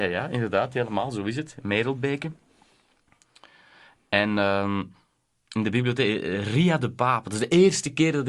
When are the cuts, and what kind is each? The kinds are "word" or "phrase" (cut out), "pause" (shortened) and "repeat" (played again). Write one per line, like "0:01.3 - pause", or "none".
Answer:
none